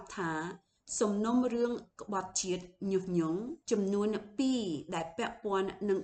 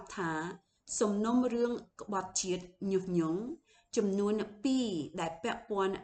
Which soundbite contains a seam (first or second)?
first